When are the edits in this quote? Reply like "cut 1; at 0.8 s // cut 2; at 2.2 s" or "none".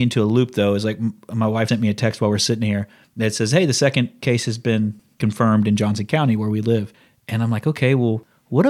cut 1; at 1.7 s